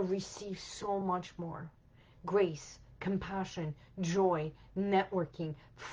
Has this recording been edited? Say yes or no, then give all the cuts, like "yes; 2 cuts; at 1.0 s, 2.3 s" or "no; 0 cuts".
no; 0 cuts